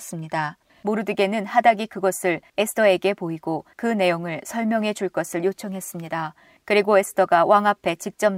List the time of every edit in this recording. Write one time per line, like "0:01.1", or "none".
none